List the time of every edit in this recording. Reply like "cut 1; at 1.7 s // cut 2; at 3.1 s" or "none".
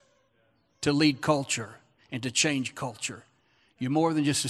none